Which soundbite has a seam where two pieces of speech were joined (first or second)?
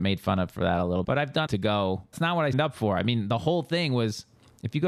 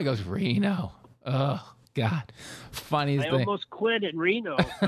first